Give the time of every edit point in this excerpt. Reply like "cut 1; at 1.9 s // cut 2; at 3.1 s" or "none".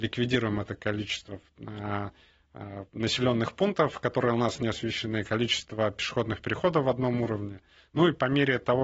cut 1; at 2.9 s